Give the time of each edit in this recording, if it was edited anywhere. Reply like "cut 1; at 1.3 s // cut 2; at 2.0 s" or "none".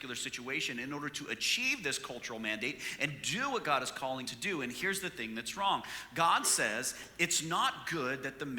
cut 1; at 4.2 s